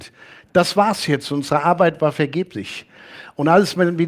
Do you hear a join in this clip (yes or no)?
no